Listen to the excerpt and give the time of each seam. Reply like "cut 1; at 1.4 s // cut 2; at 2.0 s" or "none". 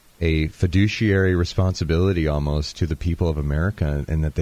none